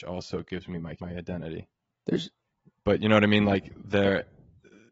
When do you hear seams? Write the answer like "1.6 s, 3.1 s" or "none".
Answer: 1.0 s, 1.9 s

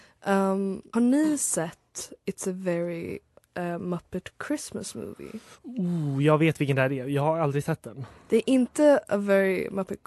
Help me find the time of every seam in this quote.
0.9 s

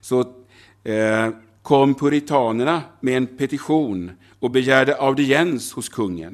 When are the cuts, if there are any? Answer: none

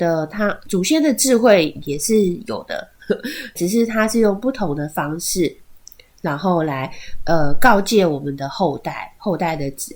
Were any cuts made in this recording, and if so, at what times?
3.6 s

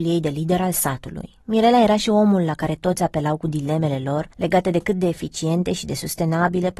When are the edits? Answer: 1.4 s, 4.3 s

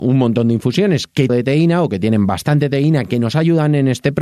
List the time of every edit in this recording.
1.3 s

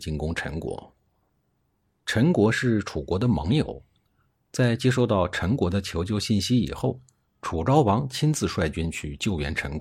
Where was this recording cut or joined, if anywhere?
none

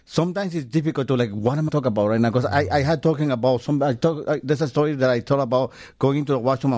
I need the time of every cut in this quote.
1.7 s

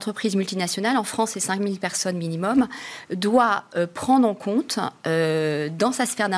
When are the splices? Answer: none

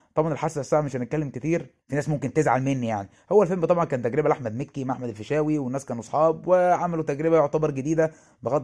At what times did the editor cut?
1.8 s

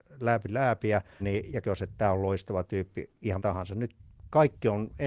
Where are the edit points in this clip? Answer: 1.2 s, 1.6 s, 3.4 s

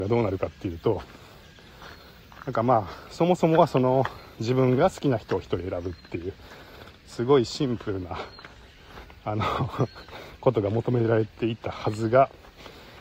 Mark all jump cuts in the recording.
11.3 s

